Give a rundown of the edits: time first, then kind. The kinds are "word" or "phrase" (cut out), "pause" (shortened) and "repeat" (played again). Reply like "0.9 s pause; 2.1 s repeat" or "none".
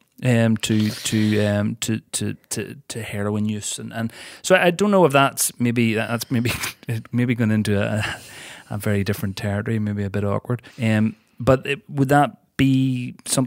10.7 s pause